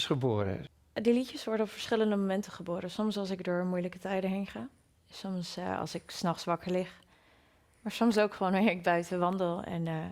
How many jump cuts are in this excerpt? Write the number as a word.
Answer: zero